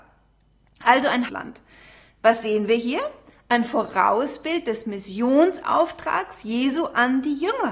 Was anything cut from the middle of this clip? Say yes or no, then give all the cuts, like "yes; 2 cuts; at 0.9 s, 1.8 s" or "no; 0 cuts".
yes; 1 cut; at 1.3 s